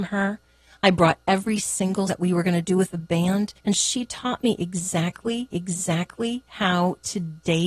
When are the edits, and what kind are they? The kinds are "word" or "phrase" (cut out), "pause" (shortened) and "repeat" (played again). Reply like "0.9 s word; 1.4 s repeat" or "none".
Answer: 2.1 s word; 3.6 s pause; 5.5 s repeat